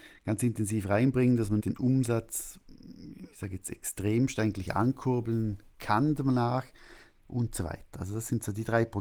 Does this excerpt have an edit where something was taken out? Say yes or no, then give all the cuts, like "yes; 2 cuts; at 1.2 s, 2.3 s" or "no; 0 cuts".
yes; 1 cut; at 1.6 s